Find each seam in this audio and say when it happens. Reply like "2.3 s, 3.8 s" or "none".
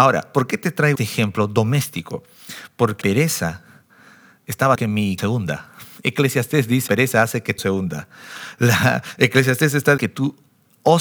0.9 s, 3.0 s, 4.7 s, 5.2 s, 6.9 s, 7.6 s, 10.0 s